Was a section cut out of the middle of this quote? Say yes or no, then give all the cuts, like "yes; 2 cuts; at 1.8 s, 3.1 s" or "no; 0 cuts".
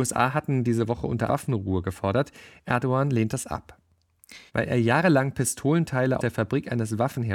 yes; 3 cuts; at 1.3 s, 4.5 s, 6.2 s